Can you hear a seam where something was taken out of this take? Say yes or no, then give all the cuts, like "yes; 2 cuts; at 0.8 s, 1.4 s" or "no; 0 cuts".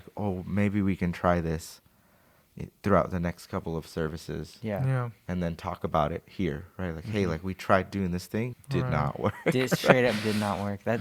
yes; 1 cut; at 8.5 s